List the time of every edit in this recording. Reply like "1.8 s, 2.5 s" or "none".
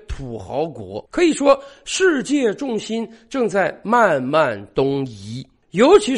1.1 s